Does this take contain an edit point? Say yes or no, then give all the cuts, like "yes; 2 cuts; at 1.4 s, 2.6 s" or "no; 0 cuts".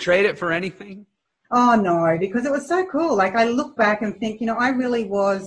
no; 0 cuts